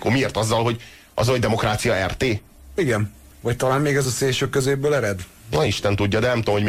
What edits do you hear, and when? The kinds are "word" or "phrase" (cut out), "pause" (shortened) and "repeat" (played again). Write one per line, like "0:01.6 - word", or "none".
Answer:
none